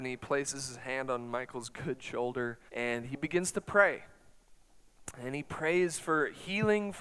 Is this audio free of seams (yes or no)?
no